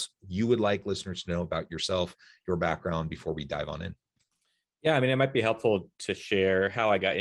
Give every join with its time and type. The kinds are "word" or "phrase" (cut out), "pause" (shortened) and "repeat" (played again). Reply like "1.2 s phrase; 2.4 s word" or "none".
none